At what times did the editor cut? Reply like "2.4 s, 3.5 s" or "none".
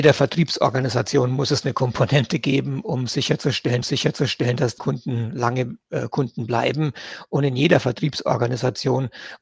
3.8 s, 4.8 s